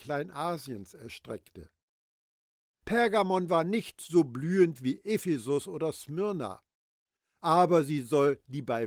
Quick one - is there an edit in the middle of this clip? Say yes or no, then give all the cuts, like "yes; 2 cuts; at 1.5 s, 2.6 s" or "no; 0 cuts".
no; 0 cuts